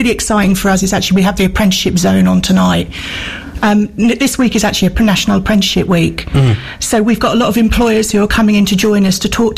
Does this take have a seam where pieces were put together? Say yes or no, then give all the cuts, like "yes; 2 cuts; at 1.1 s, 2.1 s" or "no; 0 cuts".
no; 0 cuts